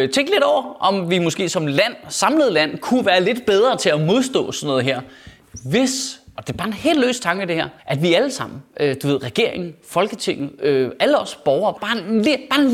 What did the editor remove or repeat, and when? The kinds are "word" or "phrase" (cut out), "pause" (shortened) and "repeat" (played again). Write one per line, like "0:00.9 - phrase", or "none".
0:07.8 - pause
0:11.8 - word